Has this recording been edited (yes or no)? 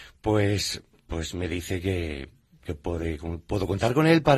no